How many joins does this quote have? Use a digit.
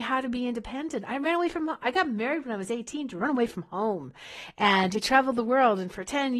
0